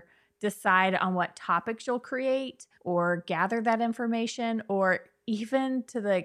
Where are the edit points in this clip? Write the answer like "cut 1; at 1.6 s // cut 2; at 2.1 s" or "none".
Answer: cut 1; at 2.7 s